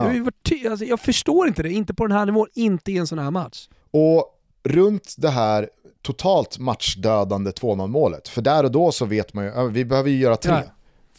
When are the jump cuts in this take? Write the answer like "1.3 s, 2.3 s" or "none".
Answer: none